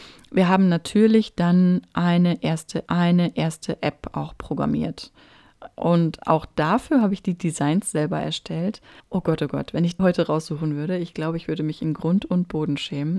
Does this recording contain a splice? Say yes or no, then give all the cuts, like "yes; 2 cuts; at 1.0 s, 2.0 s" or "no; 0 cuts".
yes; 3 cuts; at 2.9 s, 9.0 s, 10.0 s